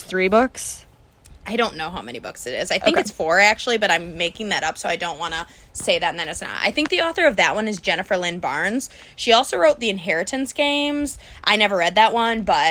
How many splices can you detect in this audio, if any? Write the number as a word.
zero